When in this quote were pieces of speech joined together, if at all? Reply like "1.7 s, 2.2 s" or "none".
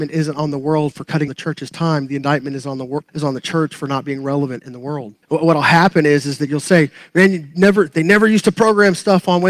1.3 s, 3.1 s, 5.2 s

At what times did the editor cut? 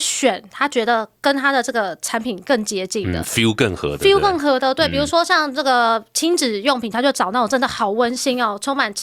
none

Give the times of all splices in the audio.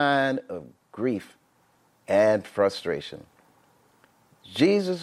none

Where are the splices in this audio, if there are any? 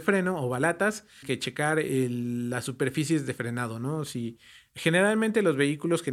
1.2 s

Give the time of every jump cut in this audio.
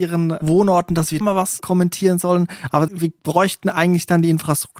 1.2 s, 2.9 s, 3.2 s

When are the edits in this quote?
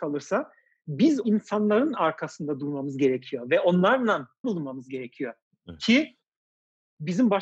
1.2 s, 4.4 s

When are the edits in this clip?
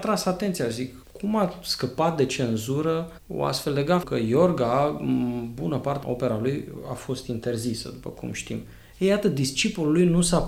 4.0 s, 6.0 s

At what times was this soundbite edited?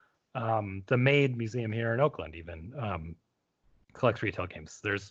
none

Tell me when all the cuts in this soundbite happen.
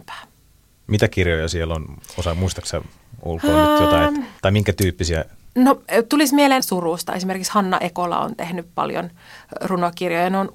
4.4 s, 6.6 s

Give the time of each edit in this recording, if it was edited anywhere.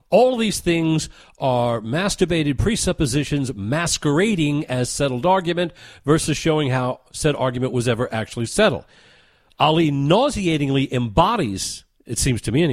none

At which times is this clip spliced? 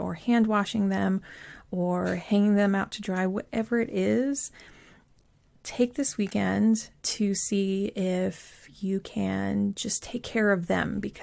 none

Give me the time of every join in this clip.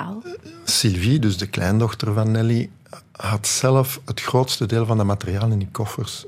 none

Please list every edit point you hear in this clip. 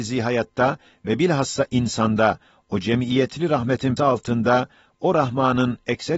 4.0 s

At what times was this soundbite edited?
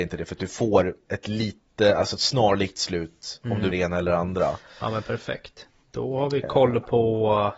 3.7 s

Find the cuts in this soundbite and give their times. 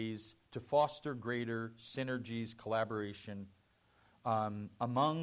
none

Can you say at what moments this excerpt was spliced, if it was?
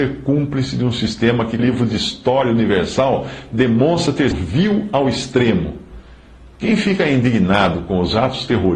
1.6 s, 4.3 s

